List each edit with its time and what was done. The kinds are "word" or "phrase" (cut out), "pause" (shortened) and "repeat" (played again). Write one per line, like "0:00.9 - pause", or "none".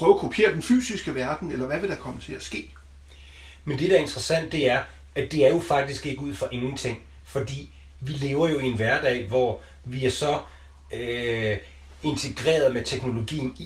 none